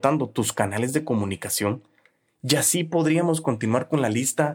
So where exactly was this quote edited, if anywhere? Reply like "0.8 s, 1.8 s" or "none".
none